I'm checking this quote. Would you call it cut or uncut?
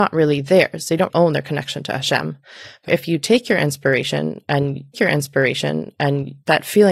cut